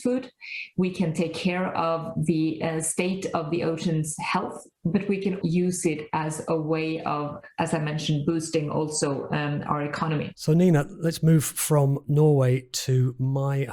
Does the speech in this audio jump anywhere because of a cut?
yes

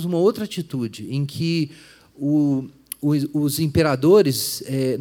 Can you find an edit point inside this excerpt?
no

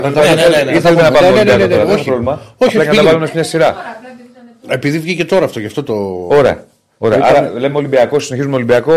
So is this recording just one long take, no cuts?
yes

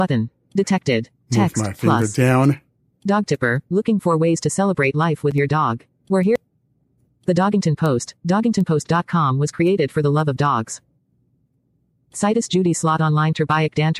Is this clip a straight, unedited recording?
no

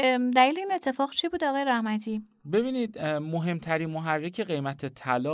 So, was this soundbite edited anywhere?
no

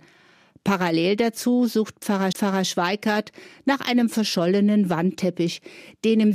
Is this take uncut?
no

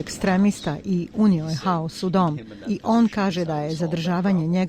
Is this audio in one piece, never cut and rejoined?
yes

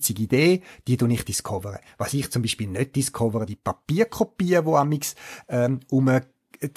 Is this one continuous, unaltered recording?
no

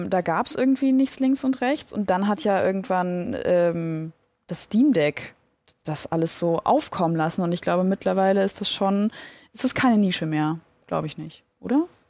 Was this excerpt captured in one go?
yes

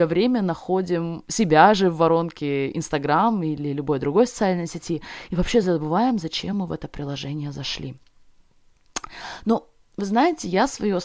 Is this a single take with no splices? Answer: yes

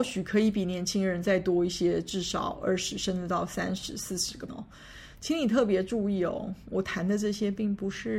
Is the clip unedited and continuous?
no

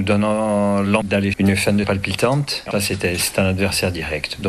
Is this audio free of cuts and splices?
no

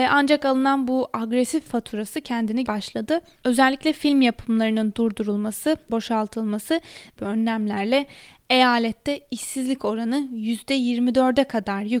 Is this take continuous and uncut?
no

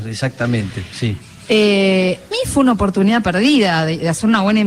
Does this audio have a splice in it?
yes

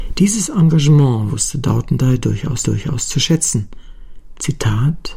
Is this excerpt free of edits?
no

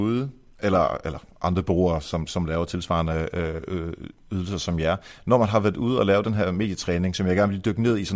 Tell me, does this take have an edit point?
no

